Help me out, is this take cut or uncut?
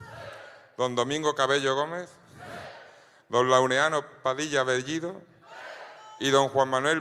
uncut